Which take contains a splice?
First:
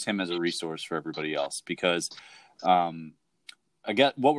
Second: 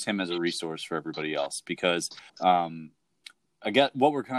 second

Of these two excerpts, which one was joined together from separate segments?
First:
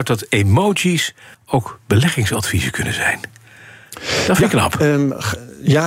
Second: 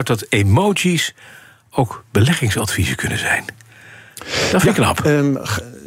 first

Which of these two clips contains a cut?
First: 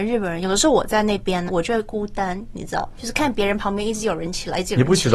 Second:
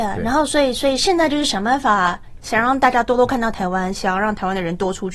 first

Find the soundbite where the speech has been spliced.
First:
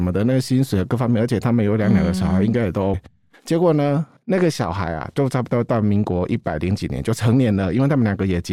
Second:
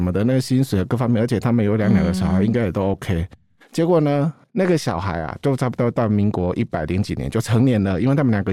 first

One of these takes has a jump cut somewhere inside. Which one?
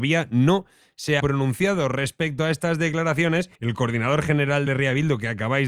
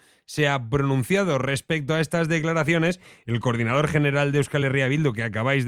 first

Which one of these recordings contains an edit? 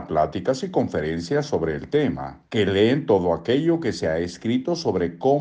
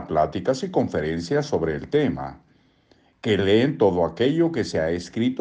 first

